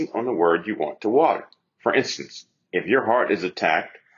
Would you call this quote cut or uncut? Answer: uncut